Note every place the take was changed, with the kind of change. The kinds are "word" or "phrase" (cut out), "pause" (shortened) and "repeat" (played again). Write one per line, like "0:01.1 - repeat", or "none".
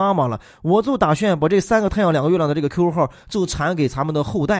none